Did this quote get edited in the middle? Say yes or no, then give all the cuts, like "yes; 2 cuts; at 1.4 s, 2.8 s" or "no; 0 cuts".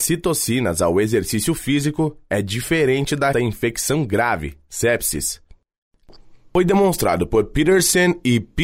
yes; 1 cut; at 3.3 s